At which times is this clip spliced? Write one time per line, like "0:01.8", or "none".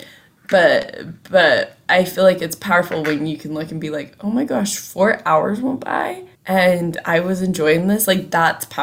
0:06.4